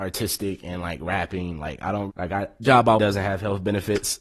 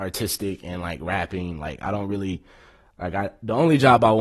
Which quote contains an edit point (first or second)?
first